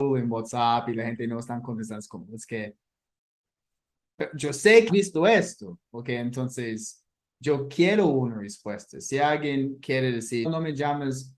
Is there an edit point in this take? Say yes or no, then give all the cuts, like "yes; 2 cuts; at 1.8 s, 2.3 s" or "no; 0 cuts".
yes; 2 cuts; at 4.9 s, 10.4 s